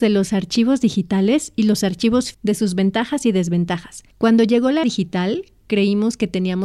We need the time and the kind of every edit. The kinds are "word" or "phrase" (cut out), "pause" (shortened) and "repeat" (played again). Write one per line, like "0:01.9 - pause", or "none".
0:02.3 - word
0:04.1 - pause
0:04.8 - word